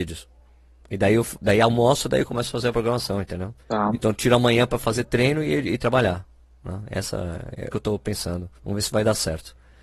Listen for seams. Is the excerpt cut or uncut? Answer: cut